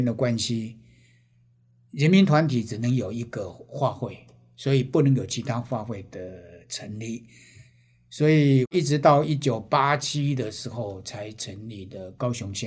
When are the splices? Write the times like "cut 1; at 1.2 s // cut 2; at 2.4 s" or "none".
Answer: none